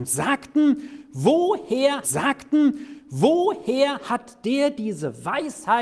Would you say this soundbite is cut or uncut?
cut